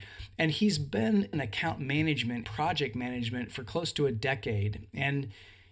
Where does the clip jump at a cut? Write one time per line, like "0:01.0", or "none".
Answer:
0:01.3
0:02.4